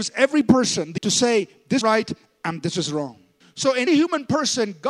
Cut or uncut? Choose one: cut